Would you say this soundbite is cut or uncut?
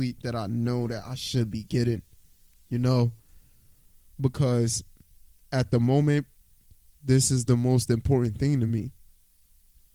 uncut